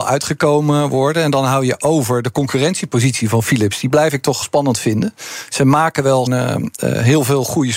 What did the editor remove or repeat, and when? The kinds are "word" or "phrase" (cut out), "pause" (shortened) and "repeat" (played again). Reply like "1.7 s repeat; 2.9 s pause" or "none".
4.4 s phrase; 6.3 s word